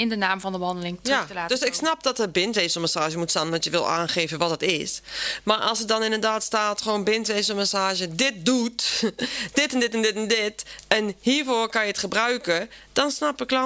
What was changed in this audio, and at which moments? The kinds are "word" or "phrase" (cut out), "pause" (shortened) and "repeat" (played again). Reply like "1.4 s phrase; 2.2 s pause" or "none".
none